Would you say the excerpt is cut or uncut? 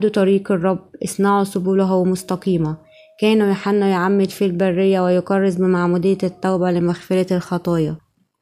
uncut